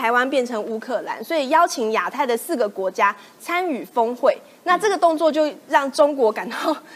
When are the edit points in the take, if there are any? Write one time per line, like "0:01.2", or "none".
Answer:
none